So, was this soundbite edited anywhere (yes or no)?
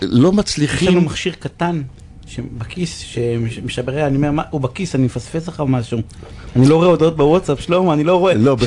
no